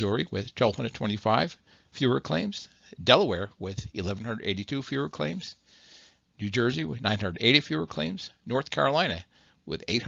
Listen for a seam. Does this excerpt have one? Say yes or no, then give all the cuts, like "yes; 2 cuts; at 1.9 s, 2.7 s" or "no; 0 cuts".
no; 0 cuts